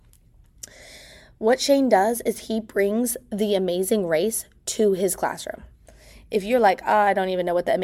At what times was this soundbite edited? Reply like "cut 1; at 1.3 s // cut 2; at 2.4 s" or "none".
none